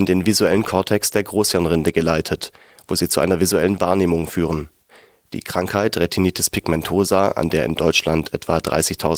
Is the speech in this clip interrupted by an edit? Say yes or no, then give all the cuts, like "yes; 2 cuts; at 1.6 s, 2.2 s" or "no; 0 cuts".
no; 0 cuts